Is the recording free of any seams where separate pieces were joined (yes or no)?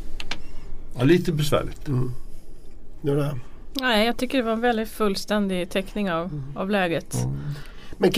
yes